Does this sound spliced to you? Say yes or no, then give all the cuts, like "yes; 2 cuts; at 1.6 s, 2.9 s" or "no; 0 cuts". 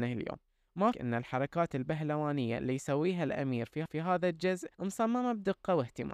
yes; 3 cuts; at 0.9 s, 3.9 s, 4.7 s